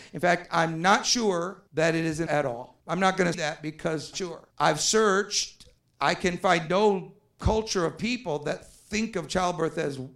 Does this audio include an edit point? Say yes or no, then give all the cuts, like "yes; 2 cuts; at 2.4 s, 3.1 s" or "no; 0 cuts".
yes; 7 cuts; at 1.7 s, 2.3 s, 2.8 s, 3.3 s, 4.1 s, 4.5 s, 5.8 s